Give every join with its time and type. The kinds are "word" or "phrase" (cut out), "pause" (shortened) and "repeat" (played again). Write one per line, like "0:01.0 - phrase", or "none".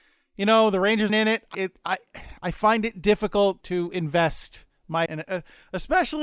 0:01.1 - word
0:01.5 - word
0:03.6 - word
0:05.1 - word